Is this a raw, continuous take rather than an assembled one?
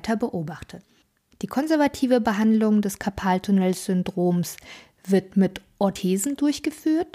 yes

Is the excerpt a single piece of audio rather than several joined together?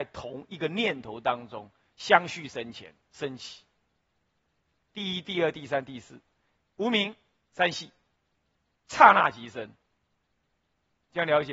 yes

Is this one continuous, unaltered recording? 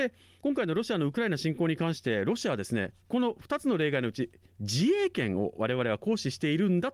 yes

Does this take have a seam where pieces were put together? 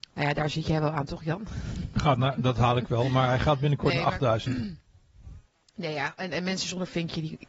no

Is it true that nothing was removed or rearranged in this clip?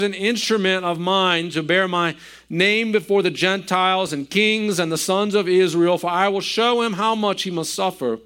yes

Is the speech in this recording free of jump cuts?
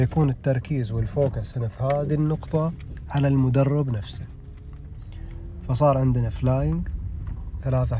yes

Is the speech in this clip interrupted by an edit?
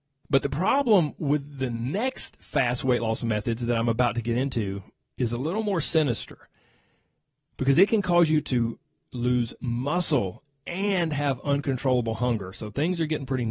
no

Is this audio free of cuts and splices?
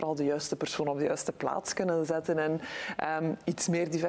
yes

